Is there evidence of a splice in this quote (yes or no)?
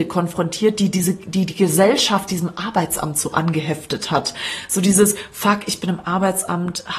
no